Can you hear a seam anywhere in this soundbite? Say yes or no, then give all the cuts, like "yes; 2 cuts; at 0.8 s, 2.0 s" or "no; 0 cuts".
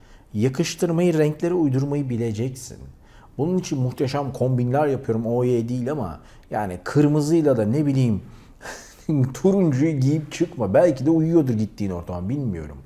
no; 0 cuts